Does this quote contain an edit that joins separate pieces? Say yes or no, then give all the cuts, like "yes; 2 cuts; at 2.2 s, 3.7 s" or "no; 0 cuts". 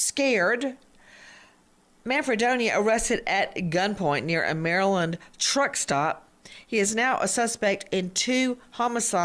no; 0 cuts